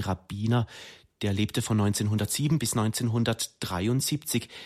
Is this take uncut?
yes; 0 cuts

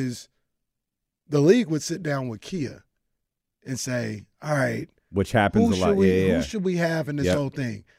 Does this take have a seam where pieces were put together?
no; 0 cuts

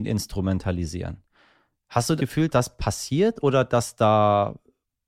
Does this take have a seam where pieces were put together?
yes; 2 cuts; at 2.2 s, 2.5 s

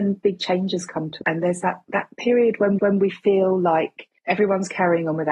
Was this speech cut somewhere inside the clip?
yes; 3 cuts; at 1.2 s, 2.8 s, 4.2 s

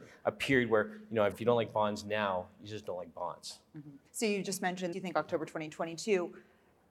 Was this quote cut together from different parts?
yes; 3 cuts; at 1.3 s, 4.1 s, 4.9 s

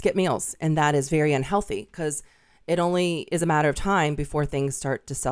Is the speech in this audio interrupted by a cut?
no; 0 cuts

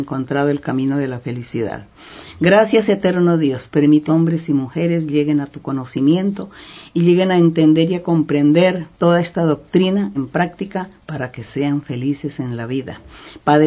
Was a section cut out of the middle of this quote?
yes; 3 cuts; at 4.1 s, 8.9 s, 10.1 s

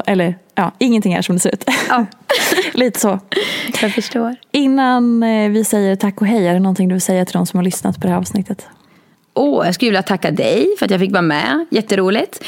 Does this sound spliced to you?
no; 0 cuts

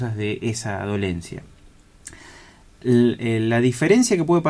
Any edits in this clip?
no; 0 cuts

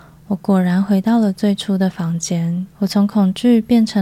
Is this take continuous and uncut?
no; 1 cut; at 2.7 s

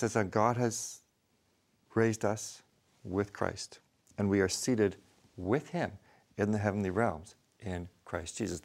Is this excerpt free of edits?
yes; 0 cuts

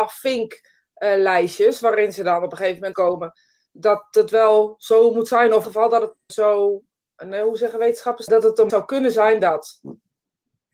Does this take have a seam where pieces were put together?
yes; 6 cuts; at 2.9 s, 3.7 s, 5.6 s, 6.3 s, 8.3 s, 8.7 s

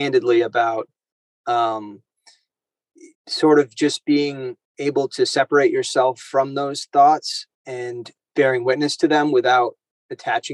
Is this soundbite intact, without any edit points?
no; 3 cuts; at 3.1 s, 4.6 s, 7.5 s

